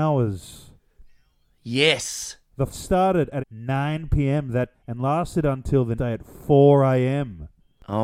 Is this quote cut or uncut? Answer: cut